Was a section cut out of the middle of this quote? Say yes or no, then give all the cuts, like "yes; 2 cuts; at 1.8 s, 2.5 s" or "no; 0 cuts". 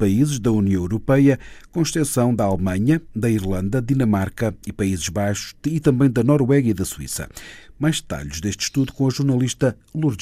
no; 0 cuts